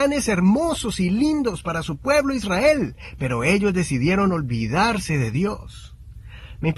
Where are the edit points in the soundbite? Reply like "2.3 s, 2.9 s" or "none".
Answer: none